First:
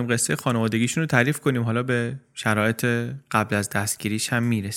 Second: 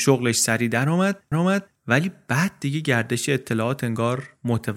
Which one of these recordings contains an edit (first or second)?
second